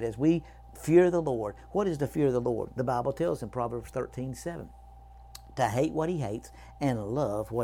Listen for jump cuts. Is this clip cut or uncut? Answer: uncut